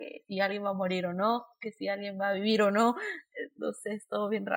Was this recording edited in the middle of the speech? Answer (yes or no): no